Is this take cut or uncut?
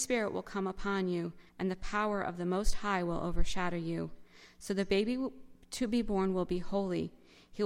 cut